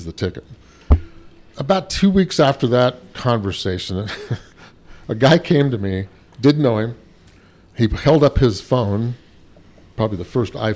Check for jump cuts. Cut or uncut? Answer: uncut